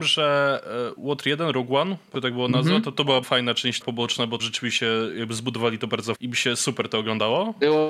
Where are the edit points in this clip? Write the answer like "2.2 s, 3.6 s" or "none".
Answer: 1.0 s, 2.1 s, 3.2 s, 3.8 s, 4.4 s, 6.1 s